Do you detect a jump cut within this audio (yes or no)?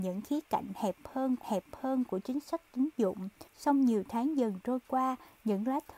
yes